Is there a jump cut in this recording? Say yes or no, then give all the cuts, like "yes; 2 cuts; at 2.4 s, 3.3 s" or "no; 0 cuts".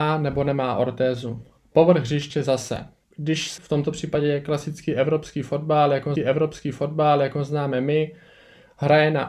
yes; 4 cuts; at 1.6 s, 3.0 s, 3.6 s, 6.2 s